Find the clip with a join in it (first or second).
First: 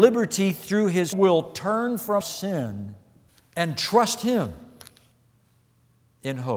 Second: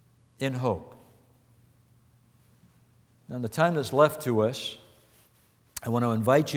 first